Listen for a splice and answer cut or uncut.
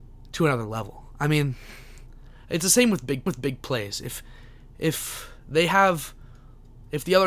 cut